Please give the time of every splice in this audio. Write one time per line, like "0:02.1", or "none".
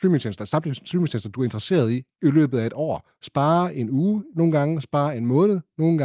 none